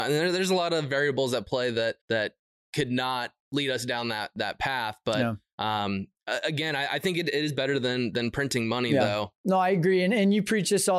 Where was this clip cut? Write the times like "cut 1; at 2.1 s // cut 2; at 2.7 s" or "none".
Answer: cut 1; at 2.0 s